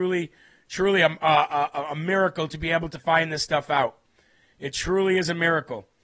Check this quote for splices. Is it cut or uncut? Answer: uncut